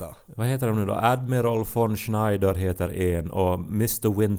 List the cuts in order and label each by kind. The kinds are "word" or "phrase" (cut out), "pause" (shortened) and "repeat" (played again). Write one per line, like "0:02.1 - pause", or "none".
none